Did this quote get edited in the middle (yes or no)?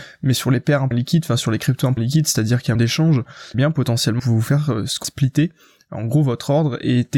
yes